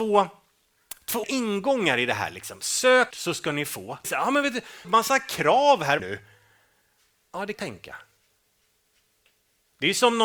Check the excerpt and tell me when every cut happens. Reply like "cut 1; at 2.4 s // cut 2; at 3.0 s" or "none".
cut 1; at 1.2 s // cut 2; at 3.1 s // cut 3; at 4.0 s // cut 4; at 4.8 s // cut 5; at 6.0 s // cut 6; at 7.5 s